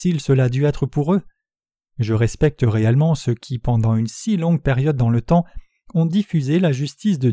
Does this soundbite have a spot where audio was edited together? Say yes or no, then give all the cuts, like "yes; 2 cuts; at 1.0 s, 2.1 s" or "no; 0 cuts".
no; 0 cuts